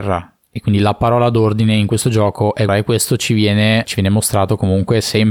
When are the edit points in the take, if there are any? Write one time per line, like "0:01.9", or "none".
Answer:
0:02.7
0:03.8

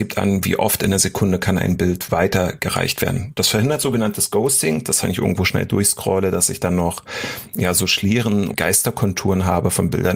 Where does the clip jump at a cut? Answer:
0:05.0
0:08.5

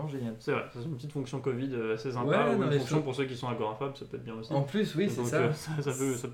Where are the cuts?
none

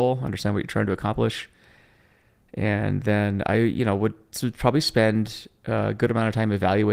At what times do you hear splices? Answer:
none

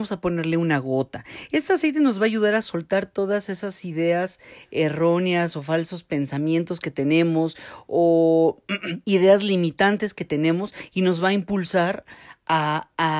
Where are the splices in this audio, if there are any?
none

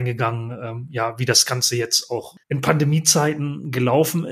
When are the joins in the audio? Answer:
0:02.4

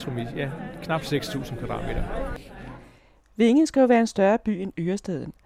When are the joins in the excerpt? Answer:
none

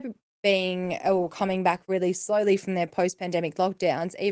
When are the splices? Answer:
none

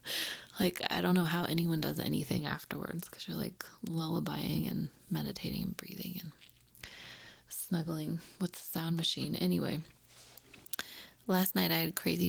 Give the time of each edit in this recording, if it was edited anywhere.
none

